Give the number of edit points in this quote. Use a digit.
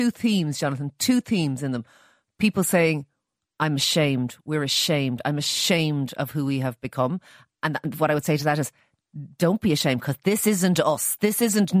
0